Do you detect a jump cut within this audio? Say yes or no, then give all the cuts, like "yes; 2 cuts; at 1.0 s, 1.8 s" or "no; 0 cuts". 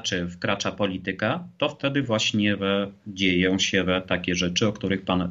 no; 0 cuts